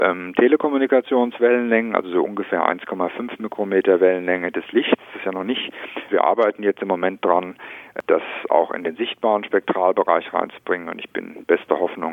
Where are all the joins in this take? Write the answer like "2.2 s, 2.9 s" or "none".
6.1 s